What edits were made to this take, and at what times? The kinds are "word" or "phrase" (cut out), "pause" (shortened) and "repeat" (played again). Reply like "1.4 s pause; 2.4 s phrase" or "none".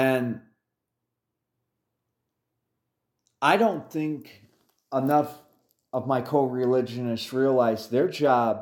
none